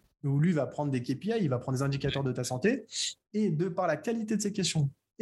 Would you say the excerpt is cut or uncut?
uncut